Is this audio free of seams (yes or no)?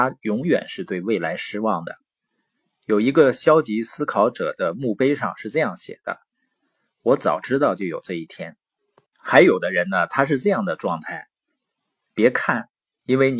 yes